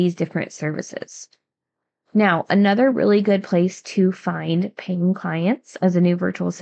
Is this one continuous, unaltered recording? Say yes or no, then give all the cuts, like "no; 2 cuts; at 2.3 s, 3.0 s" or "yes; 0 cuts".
yes; 0 cuts